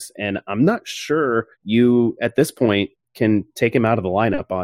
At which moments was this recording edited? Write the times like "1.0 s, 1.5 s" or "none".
1.5 s